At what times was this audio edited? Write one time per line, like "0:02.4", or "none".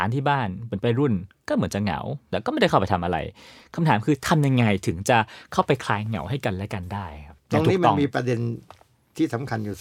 0:07.4